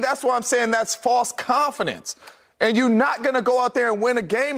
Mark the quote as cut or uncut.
uncut